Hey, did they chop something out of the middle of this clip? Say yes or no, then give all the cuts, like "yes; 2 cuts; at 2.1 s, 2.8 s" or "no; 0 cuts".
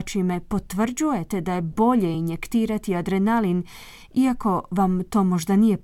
no; 0 cuts